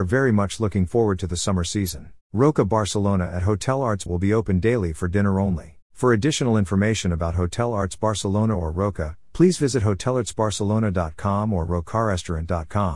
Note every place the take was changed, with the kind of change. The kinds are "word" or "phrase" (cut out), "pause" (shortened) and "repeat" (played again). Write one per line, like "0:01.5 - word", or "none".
0:02.2 - pause
0:04.1 - word
0:05.8 - pause